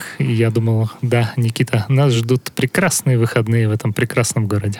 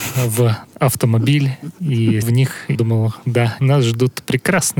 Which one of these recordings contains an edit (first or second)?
second